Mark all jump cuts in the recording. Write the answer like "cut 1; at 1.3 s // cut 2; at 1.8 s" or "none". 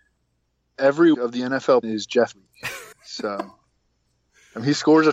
cut 1; at 1.1 s // cut 2; at 1.8 s // cut 3; at 2.3 s // cut 4; at 2.9 s